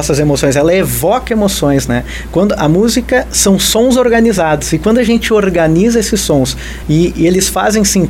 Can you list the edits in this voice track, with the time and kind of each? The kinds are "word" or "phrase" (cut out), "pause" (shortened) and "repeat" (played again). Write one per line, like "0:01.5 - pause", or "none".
none